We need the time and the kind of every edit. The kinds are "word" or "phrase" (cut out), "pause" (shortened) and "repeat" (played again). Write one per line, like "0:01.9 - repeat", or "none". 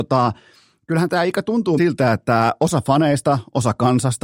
0:01.8 - word